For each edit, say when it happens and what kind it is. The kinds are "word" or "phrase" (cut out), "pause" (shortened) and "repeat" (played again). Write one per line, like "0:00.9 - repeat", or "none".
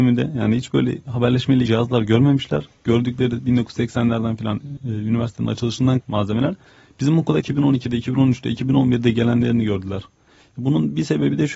0:01.7 - word
0:04.8 - word
0:06.0 - word
0:07.4 - word